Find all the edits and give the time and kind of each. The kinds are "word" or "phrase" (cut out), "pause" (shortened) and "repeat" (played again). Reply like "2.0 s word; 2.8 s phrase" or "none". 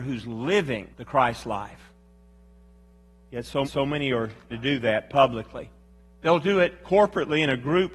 0.9 s pause; 3.6 s repeat; 4.5 s word; 5.9 s pause